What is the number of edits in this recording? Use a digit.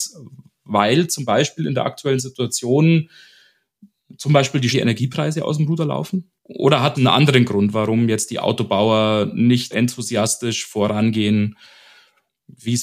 4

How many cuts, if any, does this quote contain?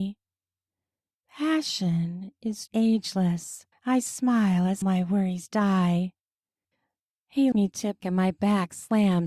5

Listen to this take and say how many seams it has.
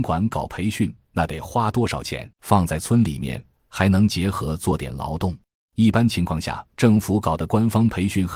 3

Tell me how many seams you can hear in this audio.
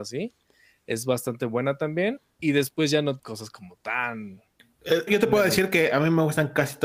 2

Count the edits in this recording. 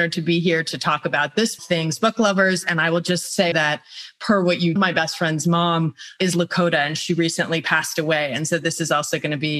3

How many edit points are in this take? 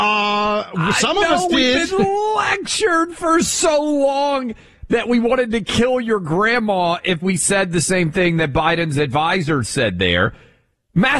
2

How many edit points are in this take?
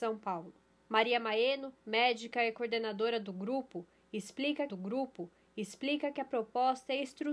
2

